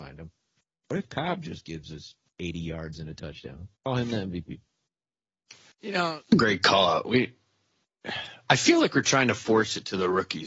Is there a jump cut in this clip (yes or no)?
yes